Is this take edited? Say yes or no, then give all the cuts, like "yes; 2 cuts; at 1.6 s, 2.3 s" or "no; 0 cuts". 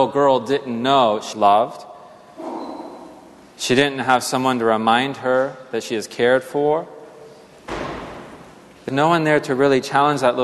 yes; 2 cuts; at 1.3 s, 8.9 s